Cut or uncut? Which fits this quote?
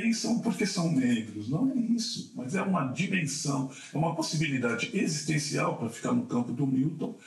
uncut